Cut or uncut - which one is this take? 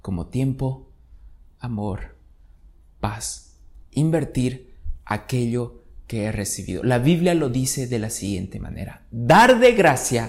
uncut